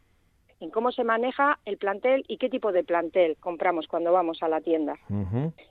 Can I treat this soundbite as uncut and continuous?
yes; 0 cuts

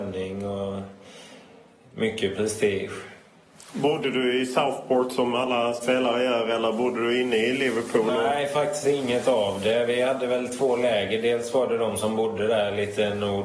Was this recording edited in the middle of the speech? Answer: no; 0 cuts

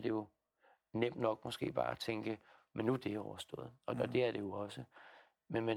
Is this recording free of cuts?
yes; 0 cuts

